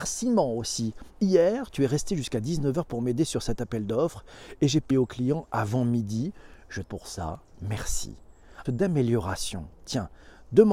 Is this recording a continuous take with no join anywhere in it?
no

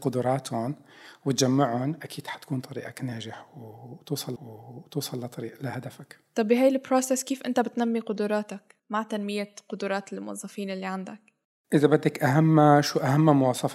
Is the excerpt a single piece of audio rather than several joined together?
no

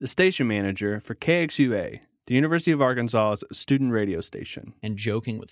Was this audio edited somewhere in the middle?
no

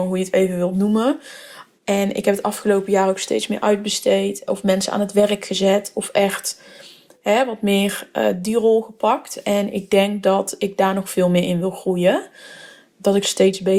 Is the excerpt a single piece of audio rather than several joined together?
yes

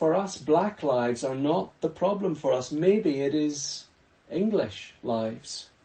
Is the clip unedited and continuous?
yes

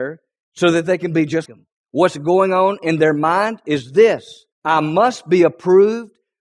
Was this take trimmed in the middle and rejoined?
yes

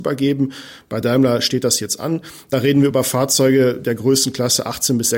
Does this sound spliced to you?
no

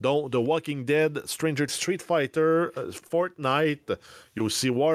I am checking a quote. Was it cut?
yes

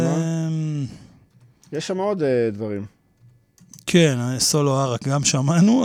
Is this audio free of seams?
yes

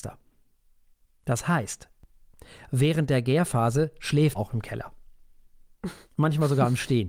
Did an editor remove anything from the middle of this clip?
yes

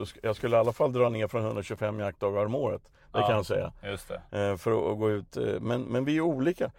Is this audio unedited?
yes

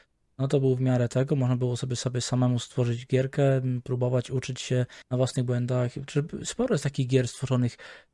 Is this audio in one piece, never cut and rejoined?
no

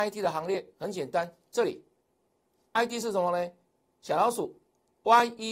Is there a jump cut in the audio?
no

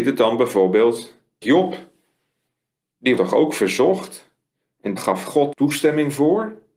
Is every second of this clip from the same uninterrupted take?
no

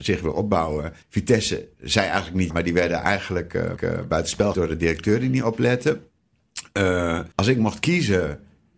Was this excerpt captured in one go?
no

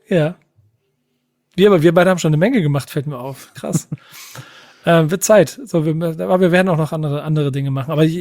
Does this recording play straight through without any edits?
yes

